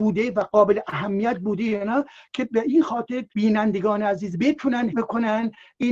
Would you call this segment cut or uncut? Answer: cut